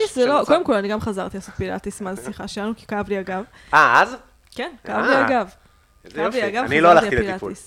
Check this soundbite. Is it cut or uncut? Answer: uncut